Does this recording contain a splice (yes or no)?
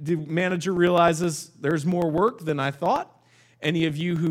no